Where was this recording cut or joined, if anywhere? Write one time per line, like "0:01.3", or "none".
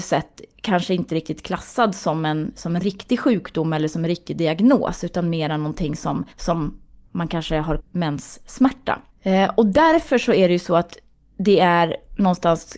0:06.3
0:07.8
0:09.1

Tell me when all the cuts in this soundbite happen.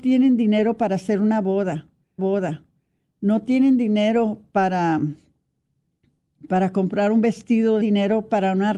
0:02.2
0:07.8

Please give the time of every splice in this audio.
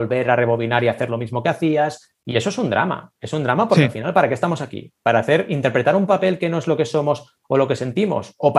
none

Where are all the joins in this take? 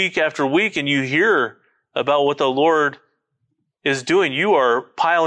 none

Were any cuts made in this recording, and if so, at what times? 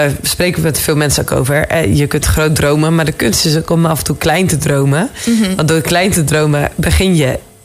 none

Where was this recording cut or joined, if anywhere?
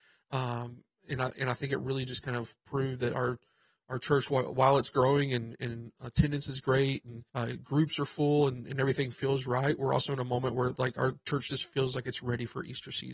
0:07.3

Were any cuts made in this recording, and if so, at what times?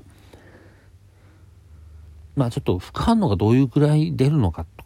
0:02.3

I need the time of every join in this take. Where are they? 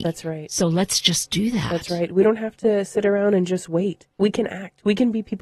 0:04.1

